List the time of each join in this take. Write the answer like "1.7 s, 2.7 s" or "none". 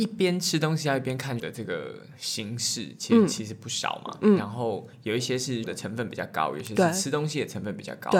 1.4 s, 5.6 s